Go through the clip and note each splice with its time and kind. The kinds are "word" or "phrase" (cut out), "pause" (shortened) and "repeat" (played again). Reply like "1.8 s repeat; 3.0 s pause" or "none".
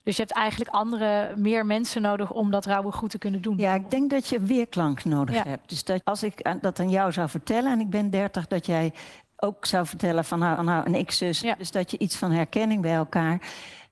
6.0 s phrase; 10.6 s repeat; 11.4 s word